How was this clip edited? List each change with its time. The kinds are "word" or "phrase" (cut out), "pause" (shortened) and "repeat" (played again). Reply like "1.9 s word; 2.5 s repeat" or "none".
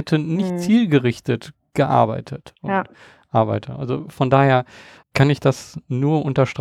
5.0 s word